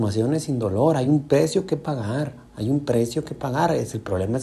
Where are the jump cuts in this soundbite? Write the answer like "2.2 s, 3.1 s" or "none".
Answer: none